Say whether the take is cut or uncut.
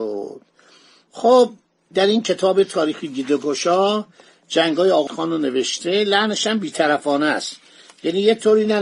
cut